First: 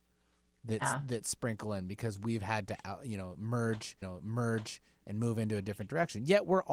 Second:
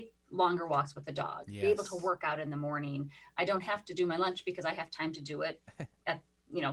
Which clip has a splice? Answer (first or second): first